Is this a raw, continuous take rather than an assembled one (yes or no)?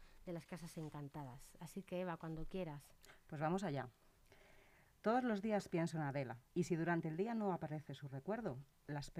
no